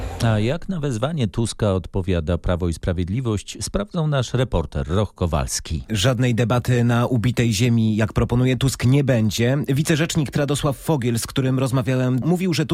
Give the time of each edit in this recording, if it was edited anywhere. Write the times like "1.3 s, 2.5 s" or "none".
10.3 s